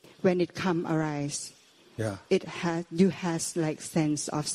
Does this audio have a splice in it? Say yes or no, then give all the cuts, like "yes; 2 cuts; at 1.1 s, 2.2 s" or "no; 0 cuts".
no; 0 cuts